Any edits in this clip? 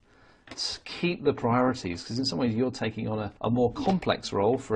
yes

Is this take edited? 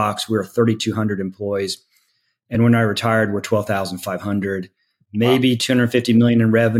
no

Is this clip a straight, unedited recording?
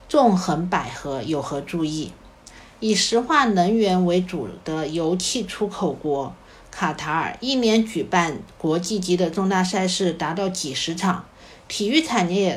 yes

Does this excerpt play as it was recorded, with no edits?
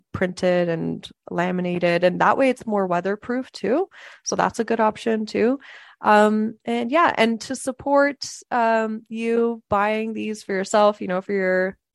yes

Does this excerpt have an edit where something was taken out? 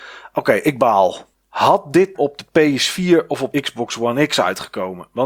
yes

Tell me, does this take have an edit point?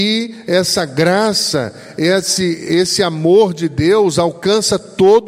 no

